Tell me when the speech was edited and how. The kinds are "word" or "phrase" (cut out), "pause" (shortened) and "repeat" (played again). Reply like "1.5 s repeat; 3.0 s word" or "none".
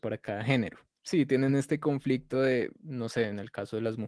none